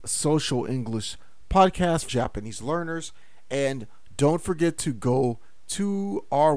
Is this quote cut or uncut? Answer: cut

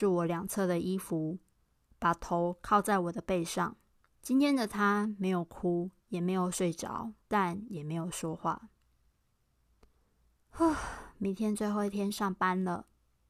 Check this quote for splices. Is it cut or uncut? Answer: cut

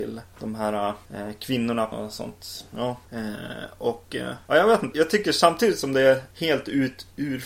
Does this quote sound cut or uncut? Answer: cut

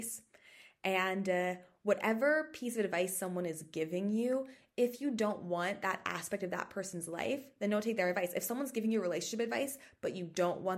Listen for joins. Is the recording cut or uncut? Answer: uncut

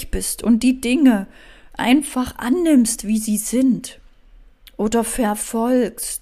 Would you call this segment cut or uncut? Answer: uncut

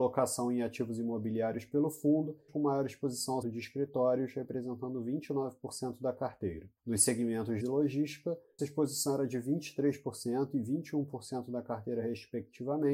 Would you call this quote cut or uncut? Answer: cut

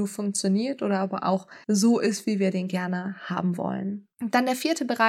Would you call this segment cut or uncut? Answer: cut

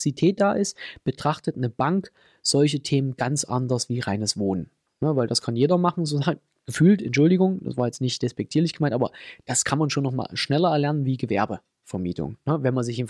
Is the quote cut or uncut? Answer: uncut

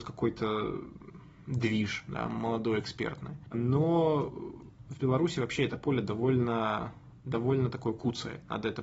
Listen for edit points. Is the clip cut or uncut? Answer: uncut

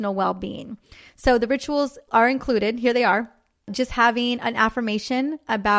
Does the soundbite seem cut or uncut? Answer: uncut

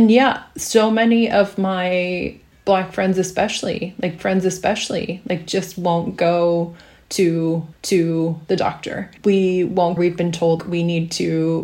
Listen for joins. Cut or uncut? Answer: cut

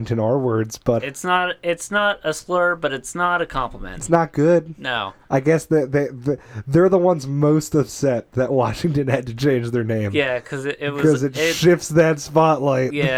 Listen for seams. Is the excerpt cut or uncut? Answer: cut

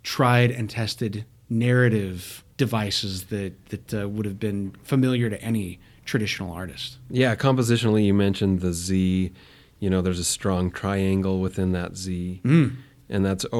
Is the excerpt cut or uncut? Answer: cut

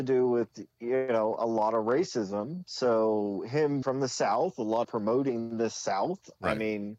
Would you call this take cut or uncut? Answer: cut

